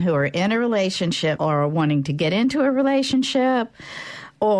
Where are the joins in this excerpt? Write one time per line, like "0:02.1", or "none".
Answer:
0:01.4